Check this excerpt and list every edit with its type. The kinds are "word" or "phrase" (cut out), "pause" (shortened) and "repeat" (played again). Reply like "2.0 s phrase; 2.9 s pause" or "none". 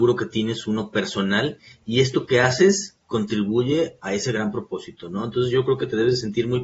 none

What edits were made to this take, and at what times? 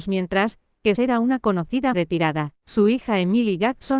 1.0 s phrase; 1.9 s word; 2.6 s pause

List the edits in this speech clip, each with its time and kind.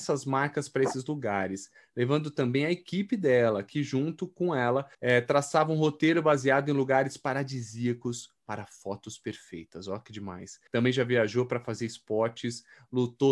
4.9 s pause; 10.7 s pause

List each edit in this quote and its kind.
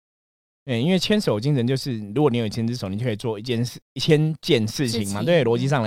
3.8 s pause

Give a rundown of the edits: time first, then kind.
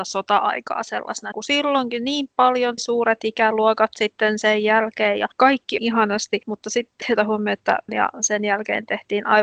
1.3 s word; 2.8 s word; 5.8 s phrase; 7.0 s word; 7.9 s word

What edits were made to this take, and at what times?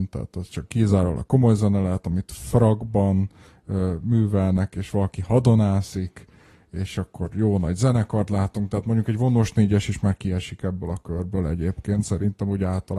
none

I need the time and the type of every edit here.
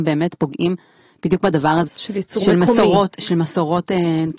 1.9 s word

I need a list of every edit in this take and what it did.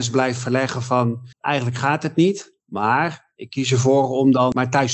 1.3 s pause; 2.6 s pause

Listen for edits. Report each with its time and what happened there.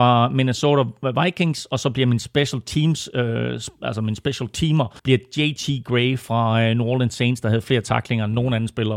5.0 s pause

